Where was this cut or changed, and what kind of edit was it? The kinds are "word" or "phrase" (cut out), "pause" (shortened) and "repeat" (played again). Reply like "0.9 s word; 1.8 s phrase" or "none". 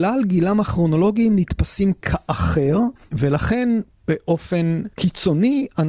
4.9 s pause